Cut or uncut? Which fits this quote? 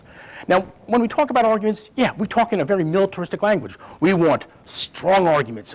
uncut